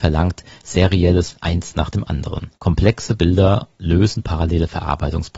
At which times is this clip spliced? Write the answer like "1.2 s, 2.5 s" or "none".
1.3 s, 2.6 s